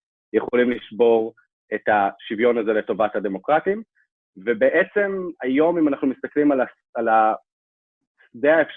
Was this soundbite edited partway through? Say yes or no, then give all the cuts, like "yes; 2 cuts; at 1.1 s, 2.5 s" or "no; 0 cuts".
no; 0 cuts